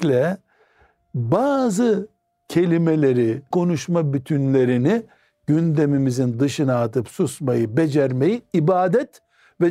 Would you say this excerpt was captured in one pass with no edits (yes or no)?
no